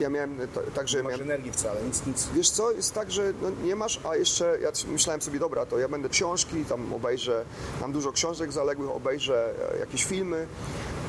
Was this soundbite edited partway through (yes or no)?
yes